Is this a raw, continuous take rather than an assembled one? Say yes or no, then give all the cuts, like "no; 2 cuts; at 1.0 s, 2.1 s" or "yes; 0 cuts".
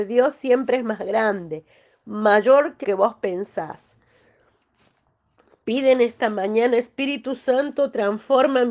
no; 1 cut; at 2.8 s